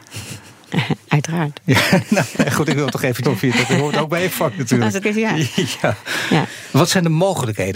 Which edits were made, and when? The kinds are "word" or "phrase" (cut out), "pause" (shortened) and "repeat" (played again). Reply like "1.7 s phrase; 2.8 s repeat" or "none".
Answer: 2.3 s word; 3.2 s word; 5.0 s word